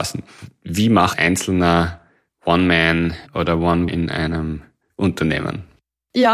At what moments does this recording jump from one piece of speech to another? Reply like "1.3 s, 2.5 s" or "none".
1.1 s, 3.3 s, 3.9 s